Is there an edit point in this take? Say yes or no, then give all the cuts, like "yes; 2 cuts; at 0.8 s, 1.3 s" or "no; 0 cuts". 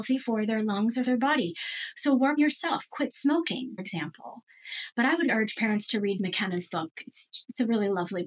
yes; 5 cuts; at 1.0 s, 2.4 s, 3.8 s, 5.3 s, 6.2 s